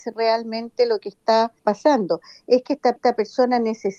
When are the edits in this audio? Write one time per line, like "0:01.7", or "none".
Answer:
0:01.6
0:03.0